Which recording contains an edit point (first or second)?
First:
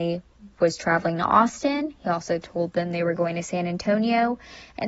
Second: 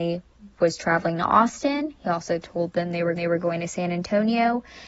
second